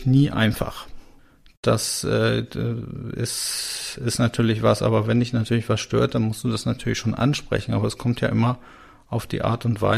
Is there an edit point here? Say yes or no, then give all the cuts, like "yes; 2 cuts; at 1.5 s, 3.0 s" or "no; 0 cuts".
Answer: no; 0 cuts